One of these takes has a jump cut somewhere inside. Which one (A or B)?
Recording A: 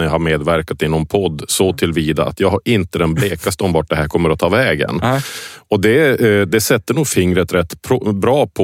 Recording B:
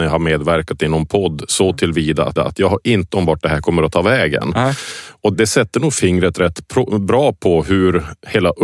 B